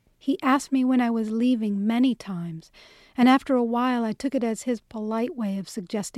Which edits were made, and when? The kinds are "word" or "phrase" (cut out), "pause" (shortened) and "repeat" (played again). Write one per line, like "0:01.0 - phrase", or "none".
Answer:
none